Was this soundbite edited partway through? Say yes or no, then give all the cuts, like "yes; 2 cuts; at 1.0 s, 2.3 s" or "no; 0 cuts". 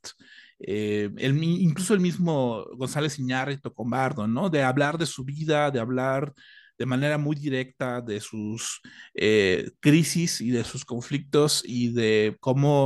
no; 0 cuts